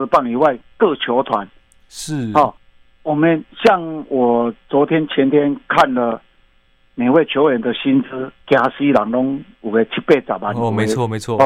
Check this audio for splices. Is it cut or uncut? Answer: uncut